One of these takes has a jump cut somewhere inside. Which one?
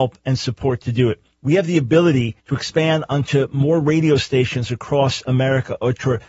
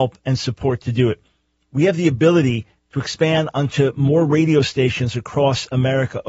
first; 2 cuts; at 1.3 s, 2.4 s

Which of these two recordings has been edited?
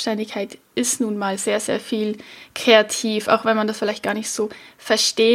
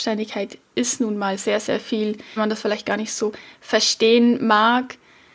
second; 1 cut; at 2.4 s

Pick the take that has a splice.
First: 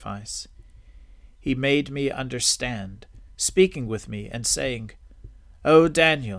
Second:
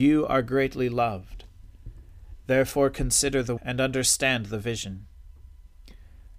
second; 1 cut; at 3.6 s

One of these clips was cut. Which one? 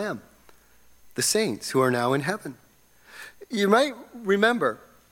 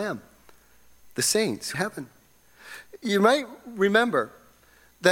second; 1 cut; at 1.7 s

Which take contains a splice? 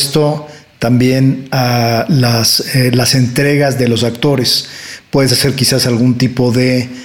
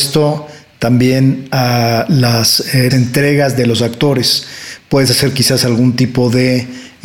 second; 1 cut; at 2.9 s

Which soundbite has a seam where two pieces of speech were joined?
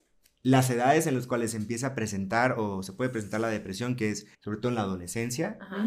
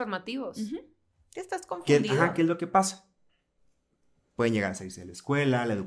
first; 1 cut; at 4.3 s

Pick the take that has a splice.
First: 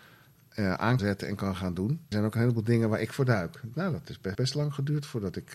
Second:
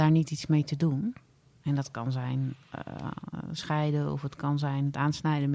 first; 4 cuts; at 1.0 s, 2.1 s, 3.7 s, 4.3 s

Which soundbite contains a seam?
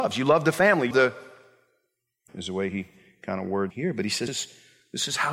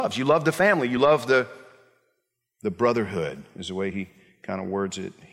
first; 4 cuts; at 0.9 s, 2.3 s, 3.7 s, 4.3 s

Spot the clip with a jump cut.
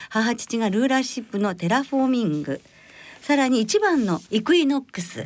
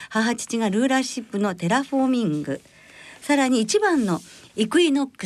first; 1 cut; at 4.3 s

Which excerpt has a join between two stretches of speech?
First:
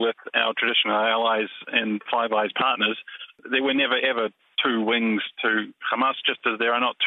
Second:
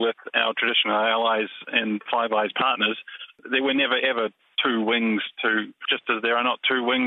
second; 1 cut; at 5.8 s

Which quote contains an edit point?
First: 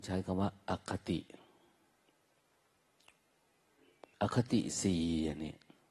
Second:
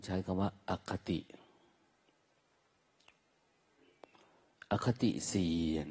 first; 1 cut; at 4.1 s

